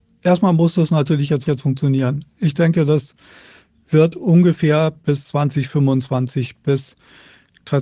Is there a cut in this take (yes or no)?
yes